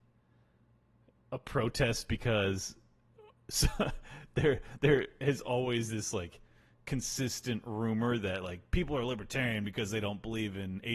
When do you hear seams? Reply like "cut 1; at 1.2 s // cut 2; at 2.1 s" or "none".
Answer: none